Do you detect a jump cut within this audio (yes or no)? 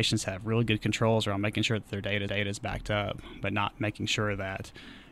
yes